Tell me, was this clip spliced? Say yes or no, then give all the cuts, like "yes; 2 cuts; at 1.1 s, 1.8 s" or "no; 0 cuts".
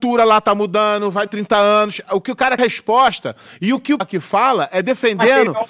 yes; 3 cuts; at 1.3 s, 2.6 s, 4.0 s